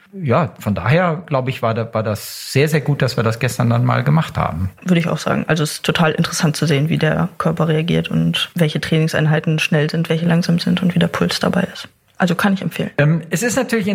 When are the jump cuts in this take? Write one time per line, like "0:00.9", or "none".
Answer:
none